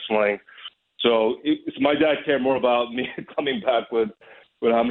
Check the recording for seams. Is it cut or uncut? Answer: uncut